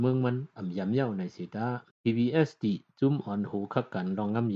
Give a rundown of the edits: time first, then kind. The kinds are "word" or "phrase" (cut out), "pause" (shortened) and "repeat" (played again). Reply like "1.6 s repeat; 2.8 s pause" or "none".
1.9 s pause